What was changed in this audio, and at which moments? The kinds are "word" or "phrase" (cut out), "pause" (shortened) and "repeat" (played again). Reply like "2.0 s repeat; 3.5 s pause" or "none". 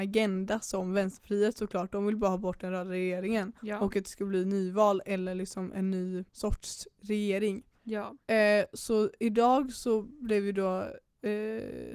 3.6 s pause; 6.3 s pause; 7.8 s pause